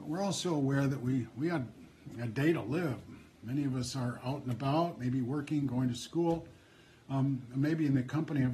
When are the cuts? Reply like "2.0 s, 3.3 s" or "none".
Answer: none